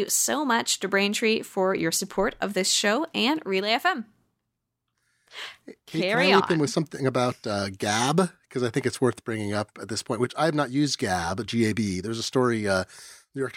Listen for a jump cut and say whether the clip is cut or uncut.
uncut